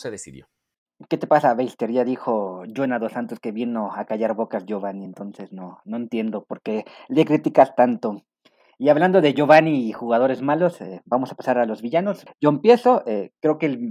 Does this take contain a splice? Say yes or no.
no